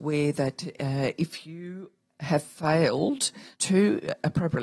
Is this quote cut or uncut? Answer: cut